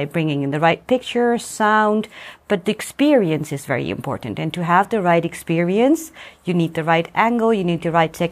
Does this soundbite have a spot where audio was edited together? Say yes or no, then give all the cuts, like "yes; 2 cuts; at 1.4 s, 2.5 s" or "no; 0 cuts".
no; 0 cuts